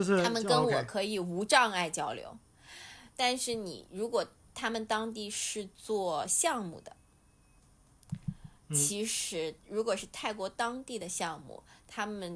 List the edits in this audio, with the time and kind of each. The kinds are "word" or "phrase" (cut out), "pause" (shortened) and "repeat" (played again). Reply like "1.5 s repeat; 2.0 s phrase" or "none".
8.6 s pause; 9.6 s pause